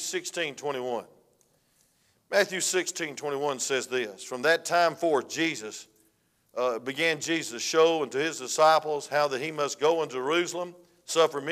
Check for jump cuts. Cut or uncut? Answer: uncut